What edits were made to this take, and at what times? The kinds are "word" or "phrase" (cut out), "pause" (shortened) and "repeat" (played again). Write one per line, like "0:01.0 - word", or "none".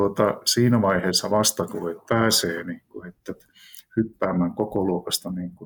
0:02.1 - phrase